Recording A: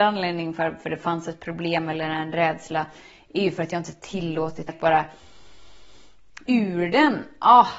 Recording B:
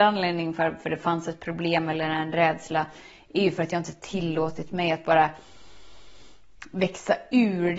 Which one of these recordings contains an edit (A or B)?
A